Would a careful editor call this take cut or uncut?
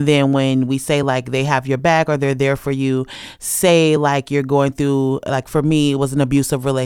uncut